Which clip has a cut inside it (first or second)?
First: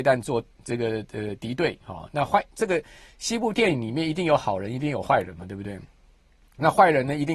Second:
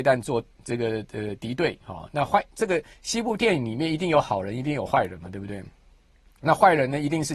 second